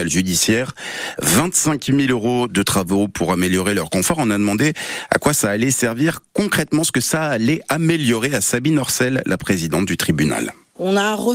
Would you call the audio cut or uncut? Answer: uncut